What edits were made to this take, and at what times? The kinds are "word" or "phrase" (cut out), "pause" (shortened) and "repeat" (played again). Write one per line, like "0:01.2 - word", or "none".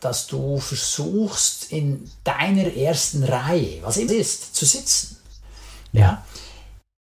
0:04.1 - word